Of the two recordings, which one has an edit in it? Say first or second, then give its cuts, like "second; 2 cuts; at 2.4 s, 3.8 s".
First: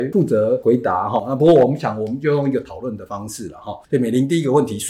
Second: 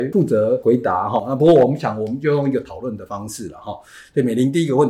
first; 1 cut; at 3.8 s